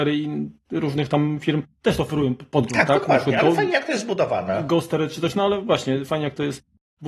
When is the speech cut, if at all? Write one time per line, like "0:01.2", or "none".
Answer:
none